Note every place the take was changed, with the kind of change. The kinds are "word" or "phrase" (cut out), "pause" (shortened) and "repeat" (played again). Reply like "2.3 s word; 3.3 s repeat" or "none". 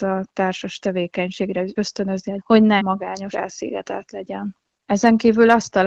1.8 s word; 2.4 s word; 2.8 s word; 3.3 s word